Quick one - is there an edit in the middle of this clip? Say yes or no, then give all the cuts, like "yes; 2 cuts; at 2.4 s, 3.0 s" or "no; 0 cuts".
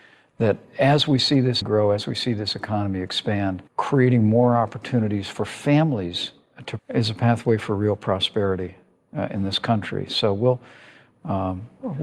yes; 3 cuts; at 1.6 s, 3.7 s, 6.8 s